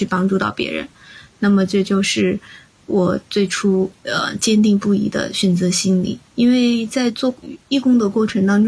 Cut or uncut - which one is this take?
cut